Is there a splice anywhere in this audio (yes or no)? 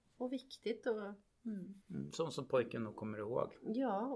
yes